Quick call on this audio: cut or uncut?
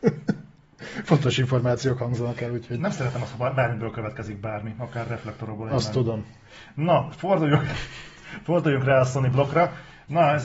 uncut